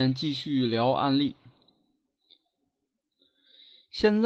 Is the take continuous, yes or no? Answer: yes